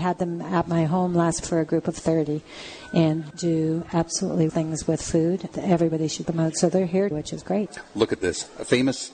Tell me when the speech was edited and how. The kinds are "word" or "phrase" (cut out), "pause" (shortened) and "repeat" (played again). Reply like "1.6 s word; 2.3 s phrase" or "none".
1.4 s word; 3.3 s word; 4.5 s word; 5.5 s word; 6.2 s word; 7.1 s word